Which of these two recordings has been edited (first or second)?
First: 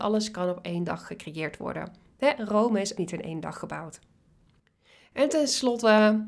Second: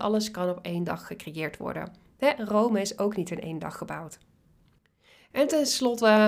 first